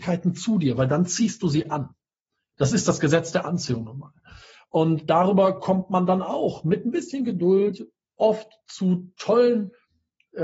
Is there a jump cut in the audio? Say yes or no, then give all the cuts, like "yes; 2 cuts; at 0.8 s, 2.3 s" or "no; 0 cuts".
no; 0 cuts